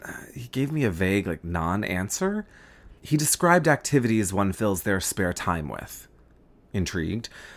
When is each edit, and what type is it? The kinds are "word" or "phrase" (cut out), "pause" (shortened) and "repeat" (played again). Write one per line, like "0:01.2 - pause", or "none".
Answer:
0:03.0 - pause